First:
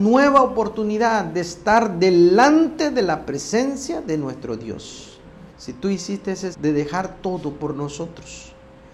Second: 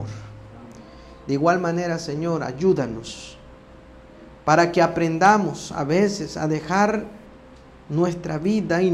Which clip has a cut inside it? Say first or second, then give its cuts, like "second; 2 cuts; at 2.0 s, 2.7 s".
first; 2 cuts; at 5.5 s, 6.5 s